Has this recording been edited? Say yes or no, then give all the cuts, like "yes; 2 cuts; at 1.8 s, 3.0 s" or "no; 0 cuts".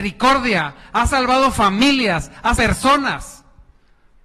yes; 1 cut; at 2.6 s